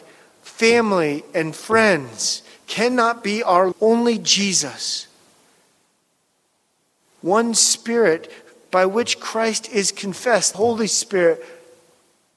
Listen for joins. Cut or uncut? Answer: cut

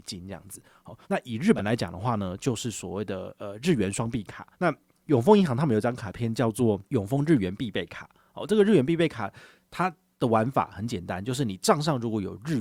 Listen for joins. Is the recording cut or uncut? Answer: cut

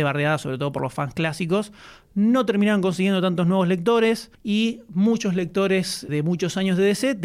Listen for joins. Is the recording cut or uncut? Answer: cut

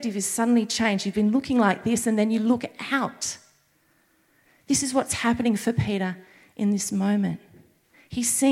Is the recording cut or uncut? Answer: uncut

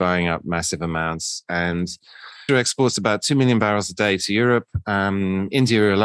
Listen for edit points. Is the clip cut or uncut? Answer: cut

